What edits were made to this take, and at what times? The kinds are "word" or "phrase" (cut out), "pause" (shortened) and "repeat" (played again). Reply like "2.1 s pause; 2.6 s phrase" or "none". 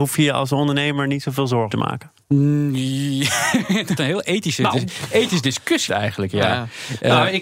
1.7 s word; 2.2 s pause; 4.0 s word; 5.9 s word